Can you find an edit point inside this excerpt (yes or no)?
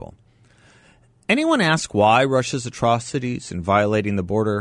no